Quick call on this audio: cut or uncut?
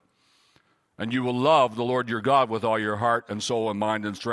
uncut